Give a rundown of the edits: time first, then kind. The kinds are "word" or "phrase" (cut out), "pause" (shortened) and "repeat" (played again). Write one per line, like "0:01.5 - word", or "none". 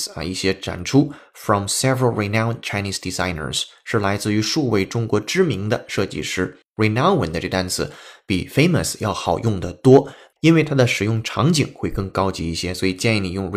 none